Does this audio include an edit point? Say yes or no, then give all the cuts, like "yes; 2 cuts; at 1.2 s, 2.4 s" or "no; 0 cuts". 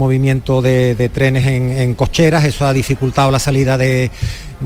no; 0 cuts